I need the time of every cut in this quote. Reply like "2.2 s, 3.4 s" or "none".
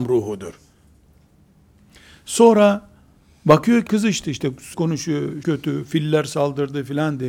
3.9 s, 4.7 s, 5.4 s